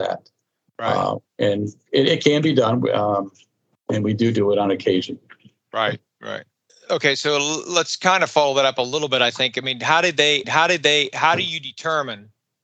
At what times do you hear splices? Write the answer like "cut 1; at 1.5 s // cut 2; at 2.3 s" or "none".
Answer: cut 1; at 6.7 s // cut 2; at 10.4 s